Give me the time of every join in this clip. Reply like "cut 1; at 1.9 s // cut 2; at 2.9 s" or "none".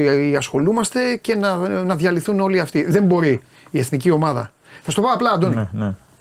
none